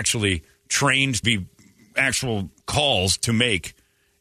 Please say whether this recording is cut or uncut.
cut